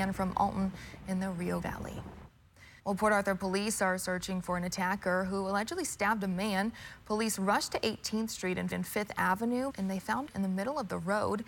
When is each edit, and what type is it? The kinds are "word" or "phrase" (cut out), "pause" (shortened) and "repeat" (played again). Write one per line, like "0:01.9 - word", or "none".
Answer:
0:01.6 - word
0:02.8 - pause
0:08.7 - repeat
0:09.7 - phrase
0:10.3 - phrase